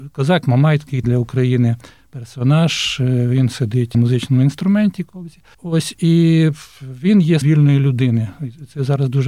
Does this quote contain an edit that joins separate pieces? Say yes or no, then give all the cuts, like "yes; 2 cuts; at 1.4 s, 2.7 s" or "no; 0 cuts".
yes; 4 cuts; at 1.0 s, 3.9 s, 5.5 s, 7.4 s